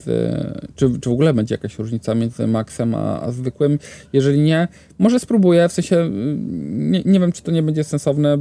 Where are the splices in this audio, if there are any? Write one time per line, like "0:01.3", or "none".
none